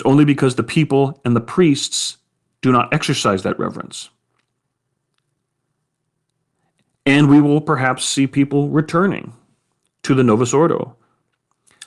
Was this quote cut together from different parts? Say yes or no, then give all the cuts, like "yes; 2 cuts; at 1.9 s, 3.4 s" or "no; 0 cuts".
no; 0 cuts